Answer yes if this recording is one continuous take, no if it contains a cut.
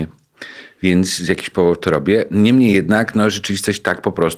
yes